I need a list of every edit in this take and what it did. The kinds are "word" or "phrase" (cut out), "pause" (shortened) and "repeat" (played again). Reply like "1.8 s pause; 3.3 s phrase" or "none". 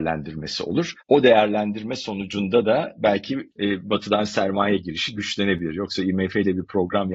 1.0 s pause; 3.5 s pause